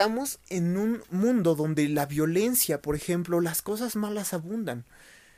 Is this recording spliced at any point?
no; 0 cuts

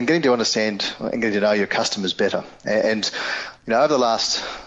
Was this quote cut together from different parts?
no; 0 cuts

